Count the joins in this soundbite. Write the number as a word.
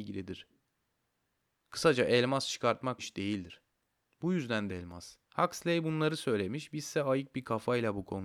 three